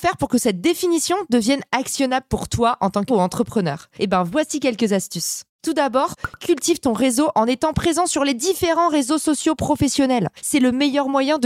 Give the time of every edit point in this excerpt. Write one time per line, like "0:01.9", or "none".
0:03.1